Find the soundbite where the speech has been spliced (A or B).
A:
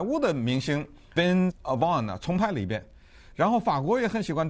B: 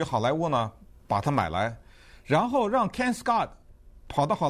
A